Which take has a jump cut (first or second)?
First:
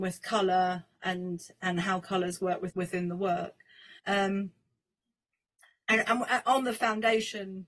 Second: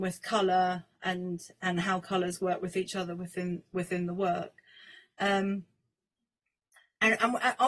first